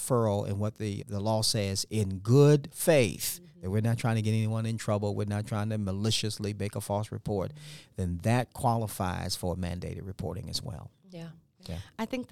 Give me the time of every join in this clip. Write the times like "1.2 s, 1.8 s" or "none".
1.0 s